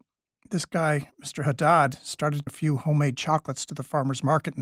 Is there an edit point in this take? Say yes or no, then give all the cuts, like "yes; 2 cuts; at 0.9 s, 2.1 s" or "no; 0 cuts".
yes; 1 cut; at 2.5 s